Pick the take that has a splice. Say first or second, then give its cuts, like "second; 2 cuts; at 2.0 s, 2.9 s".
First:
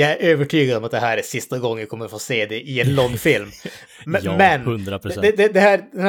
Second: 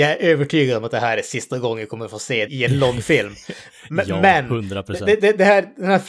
second; 1 cut; at 2.5 s